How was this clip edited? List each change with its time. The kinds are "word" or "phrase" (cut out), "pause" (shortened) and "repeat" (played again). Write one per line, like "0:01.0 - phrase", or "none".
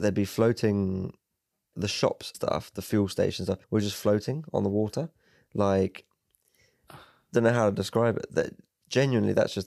0:01.7 - word
0:02.3 - word
0:03.6 - pause